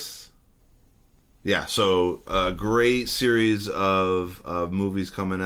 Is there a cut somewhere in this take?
no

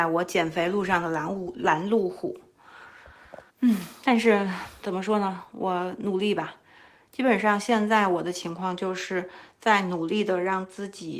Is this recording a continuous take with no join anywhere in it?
no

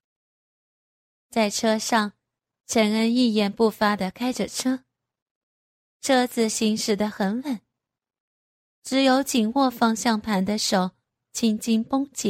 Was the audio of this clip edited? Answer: no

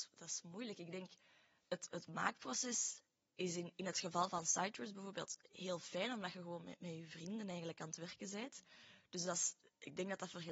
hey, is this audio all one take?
yes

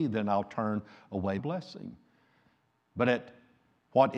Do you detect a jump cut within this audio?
yes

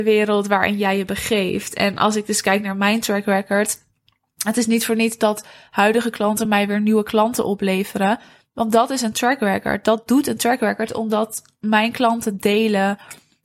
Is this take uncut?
yes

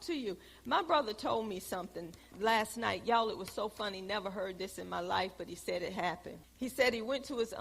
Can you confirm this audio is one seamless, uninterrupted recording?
no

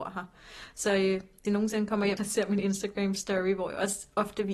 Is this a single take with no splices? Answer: no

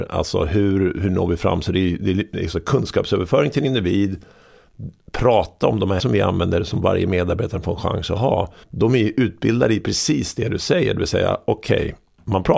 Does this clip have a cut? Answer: yes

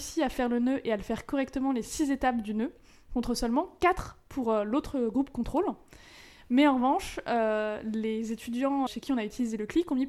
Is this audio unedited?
no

